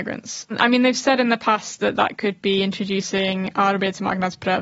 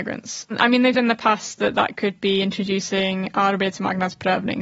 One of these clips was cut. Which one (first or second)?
second